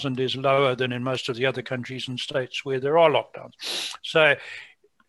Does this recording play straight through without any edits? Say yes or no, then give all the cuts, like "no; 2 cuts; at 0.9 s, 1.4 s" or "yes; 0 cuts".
yes; 0 cuts